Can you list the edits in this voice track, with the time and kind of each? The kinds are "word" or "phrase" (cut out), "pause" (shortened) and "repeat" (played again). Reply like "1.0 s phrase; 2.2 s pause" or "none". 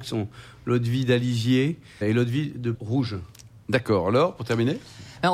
2.0 s word; 2.7 s word